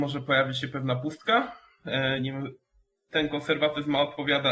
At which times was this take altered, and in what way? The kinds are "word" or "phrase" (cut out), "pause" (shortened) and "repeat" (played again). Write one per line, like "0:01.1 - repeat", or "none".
none